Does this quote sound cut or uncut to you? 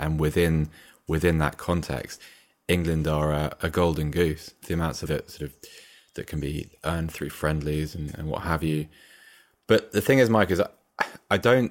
cut